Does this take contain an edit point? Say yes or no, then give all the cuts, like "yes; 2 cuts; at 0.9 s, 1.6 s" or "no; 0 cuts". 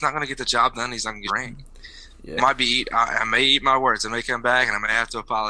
yes; 2 cuts; at 1.3 s, 2.4 s